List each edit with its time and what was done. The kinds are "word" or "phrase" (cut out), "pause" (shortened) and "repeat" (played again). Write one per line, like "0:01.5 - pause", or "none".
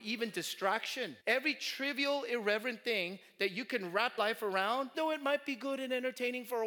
0:01.2 - pause
0:04.2 - word
0:04.9 - word